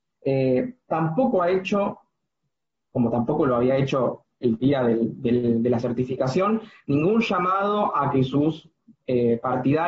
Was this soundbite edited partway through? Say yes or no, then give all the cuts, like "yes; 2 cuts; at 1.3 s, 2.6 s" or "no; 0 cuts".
no; 0 cuts